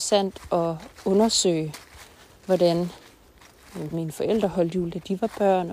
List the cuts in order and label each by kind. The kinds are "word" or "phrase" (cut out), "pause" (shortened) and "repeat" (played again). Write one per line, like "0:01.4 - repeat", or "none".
0:03.9 - word